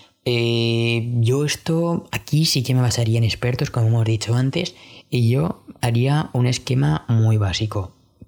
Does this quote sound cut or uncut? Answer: uncut